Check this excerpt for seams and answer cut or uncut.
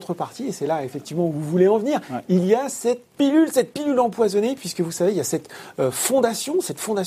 uncut